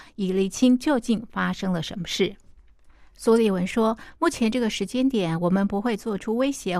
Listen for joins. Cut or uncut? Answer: uncut